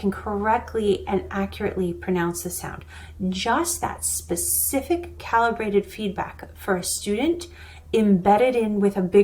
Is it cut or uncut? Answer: uncut